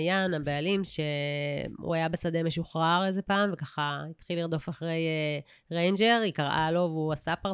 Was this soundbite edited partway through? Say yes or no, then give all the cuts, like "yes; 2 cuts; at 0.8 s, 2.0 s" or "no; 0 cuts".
no; 0 cuts